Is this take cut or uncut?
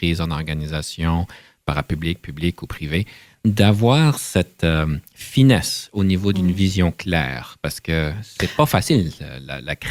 uncut